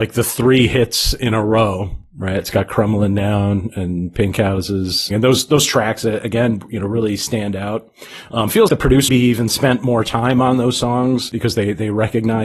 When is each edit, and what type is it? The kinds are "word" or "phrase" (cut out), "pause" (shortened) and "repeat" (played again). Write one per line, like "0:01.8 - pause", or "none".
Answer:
0:05.1 - phrase
0:08.7 - word
0:09.1 - word